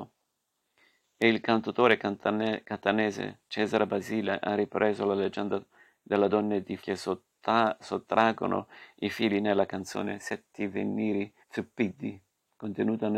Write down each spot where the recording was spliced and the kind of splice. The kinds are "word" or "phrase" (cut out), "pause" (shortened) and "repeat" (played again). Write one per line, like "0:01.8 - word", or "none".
0:06.8 - word
0:11.4 - pause